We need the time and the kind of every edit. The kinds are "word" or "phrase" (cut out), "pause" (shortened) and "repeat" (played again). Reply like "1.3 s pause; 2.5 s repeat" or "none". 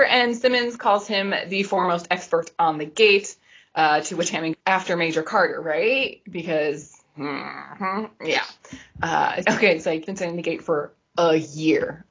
4.5 s word; 9.4 s word; 10.1 s word